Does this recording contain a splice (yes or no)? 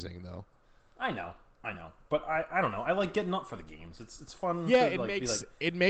no